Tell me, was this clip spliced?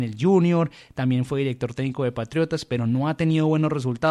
no; 0 cuts

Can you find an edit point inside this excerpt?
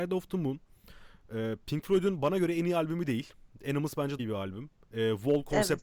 yes; 1 cut; at 4.2 s

